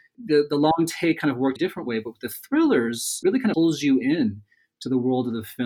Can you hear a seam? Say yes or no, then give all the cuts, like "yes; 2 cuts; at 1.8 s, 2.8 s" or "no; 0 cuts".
yes; 3 cuts; at 1.6 s, 3.2 s, 3.5 s